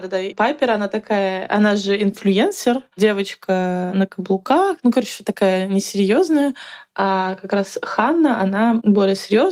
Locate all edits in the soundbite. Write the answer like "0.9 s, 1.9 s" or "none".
none

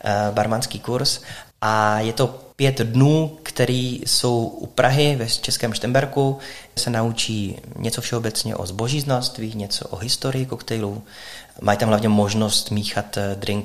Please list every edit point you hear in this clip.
1.5 s, 2.5 s, 6.8 s

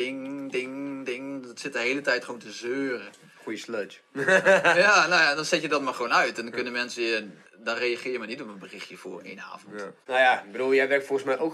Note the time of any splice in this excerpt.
7.5 s

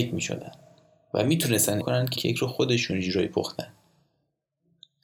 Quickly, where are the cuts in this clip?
1.8 s, 2.1 s

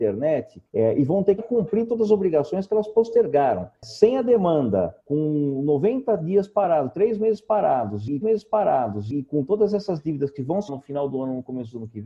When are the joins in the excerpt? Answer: 1.4 s, 5.0 s, 8.2 s, 10.7 s

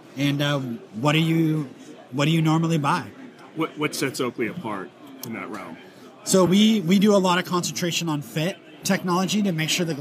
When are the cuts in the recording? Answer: none

